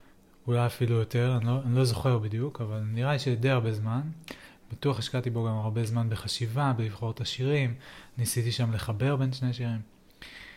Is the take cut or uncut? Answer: uncut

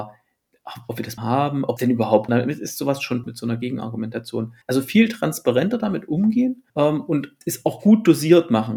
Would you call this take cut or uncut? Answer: cut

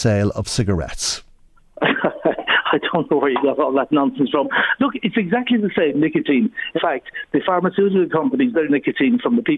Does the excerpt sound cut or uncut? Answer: cut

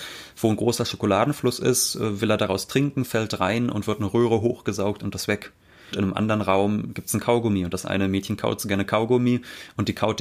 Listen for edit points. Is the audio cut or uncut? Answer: cut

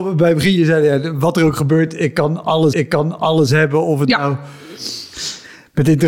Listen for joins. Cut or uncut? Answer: cut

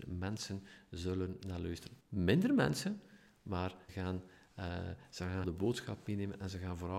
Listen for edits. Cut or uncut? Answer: cut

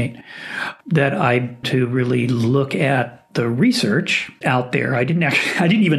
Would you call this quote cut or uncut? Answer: cut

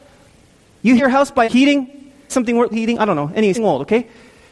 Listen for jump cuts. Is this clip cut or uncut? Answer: cut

